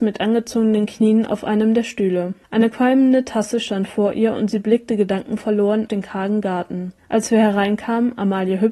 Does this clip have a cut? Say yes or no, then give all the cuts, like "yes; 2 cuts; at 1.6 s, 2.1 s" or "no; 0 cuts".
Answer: yes; 3 cuts; at 2.4 s, 5.9 s, 7.0 s